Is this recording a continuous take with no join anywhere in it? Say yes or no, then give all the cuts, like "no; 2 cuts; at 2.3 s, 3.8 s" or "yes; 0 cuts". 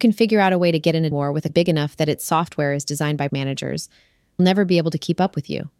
no; 4 cuts; at 1.1 s, 1.5 s, 3.3 s, 4.4 s